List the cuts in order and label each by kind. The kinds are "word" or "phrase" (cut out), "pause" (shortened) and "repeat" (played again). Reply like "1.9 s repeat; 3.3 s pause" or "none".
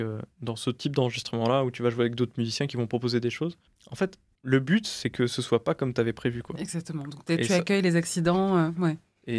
none